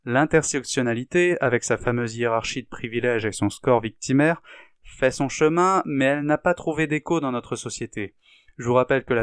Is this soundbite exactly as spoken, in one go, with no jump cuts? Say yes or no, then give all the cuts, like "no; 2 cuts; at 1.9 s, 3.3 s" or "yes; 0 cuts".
yes; 0 cuts